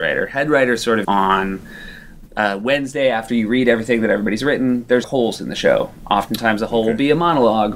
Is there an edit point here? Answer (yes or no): yes